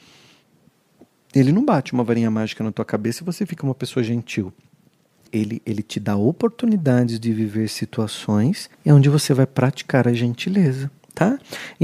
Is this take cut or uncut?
cut